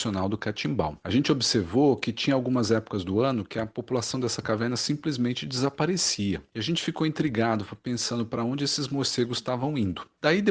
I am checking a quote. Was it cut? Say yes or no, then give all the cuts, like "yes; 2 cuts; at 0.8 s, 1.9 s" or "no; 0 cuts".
no; 0 cuts